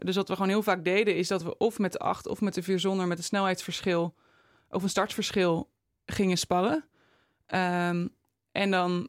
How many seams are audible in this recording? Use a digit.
0